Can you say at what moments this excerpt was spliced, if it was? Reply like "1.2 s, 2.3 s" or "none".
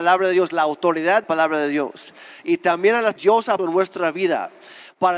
1.2 s, 3.2 s, 3.6 s